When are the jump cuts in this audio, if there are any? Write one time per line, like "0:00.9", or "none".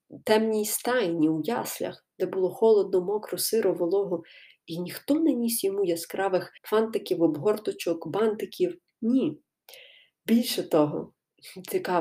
0:06.6